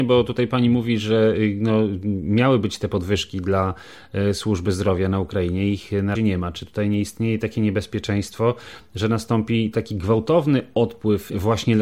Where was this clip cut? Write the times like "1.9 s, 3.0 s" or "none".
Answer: 6.2 s